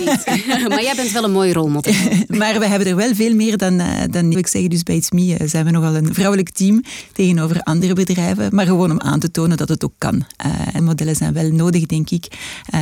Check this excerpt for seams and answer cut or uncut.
cut